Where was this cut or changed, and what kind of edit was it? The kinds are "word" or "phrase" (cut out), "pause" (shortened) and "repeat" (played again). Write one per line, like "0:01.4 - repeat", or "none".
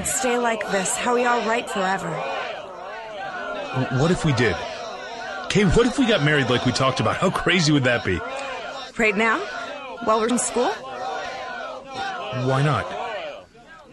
0:01.7 - word
0:10.3 - word